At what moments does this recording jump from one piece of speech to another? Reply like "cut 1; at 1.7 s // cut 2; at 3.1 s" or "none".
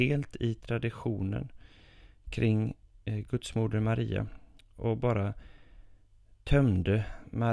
none

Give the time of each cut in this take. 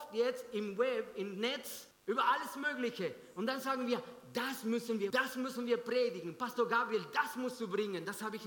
cut 1; at 1.9 s // cut 2; at 5.1 s

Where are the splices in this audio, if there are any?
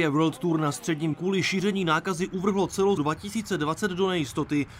cut 1; at 1.1 s // cut 2; at 3.0 s

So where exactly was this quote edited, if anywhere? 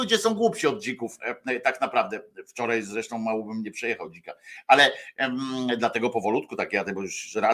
none

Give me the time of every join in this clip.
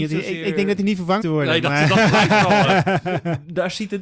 cut 1; at 1.2 s

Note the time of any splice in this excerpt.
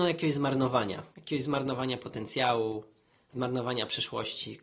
cut 1; at 1.1 s

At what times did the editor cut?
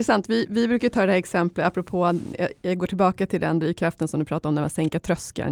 none

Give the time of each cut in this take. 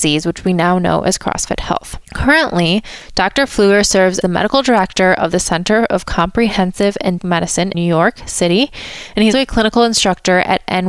cut 1; at 2.0 s // cut 2; at 4.2 s // cut 3; at 7.2 s // cut 4; at 7.7 s // cut 5; at 9.3 s

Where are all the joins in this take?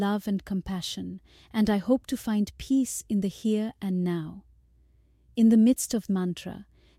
cut 1; at 6.1 s

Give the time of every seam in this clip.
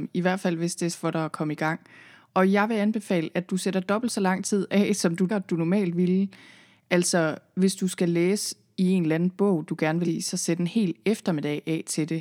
cut 1; at 0.9 s // cut 2; at 5.3 s // cut 3; at 10.0 s

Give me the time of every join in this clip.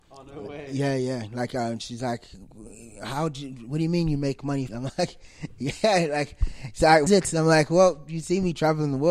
cut 1; at 4.7 s // cut 2; at 7.1 s

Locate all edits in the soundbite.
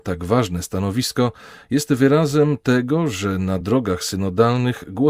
none

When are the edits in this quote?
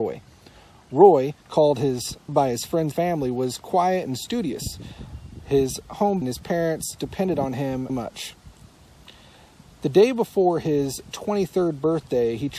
cut 1; at 1.4 s // cut 2; at 2.3 s // cut 3; at 2.9 s // cut 4; at 6.2 s // cut 5; at 7.9 s

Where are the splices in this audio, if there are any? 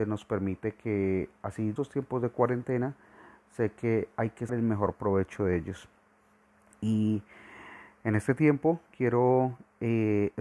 cut 1; at 1.8 s // cut 2; at 4.5 s

